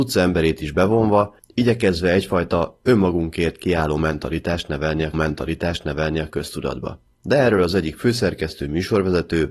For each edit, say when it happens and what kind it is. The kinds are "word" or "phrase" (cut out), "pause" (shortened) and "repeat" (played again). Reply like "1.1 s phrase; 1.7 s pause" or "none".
5.1 s repeat